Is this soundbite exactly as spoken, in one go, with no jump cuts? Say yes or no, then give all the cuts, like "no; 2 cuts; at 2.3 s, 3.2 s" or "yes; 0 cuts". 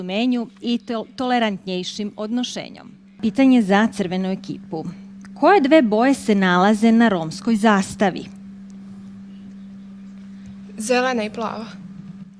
yes; 0 cuts